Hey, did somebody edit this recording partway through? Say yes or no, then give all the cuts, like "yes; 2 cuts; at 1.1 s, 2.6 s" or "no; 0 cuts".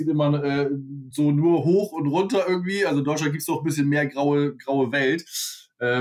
no; 0 cuts